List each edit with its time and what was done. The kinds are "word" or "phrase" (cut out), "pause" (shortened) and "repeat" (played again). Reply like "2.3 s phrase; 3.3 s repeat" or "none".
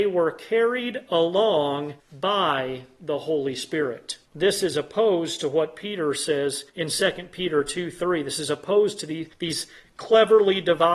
2.0 s pause; 4.3 s pause; 6.7 s pause; 9.3 s pause